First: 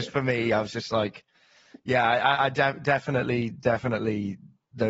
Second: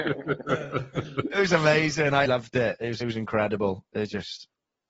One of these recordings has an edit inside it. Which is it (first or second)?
second